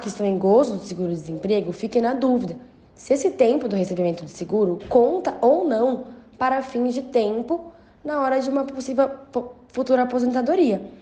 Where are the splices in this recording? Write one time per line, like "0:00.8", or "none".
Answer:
none